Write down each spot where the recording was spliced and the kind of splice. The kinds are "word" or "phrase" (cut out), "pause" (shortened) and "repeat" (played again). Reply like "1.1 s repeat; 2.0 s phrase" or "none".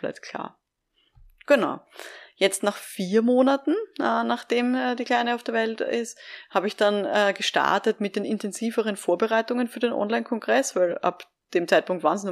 none